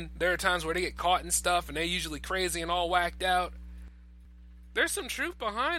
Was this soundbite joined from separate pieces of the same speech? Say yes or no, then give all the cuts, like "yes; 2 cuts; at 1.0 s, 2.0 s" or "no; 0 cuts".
no; 0 cuts